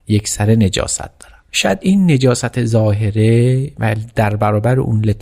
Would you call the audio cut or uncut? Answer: uncut